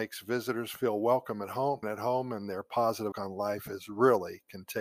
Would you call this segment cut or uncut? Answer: cut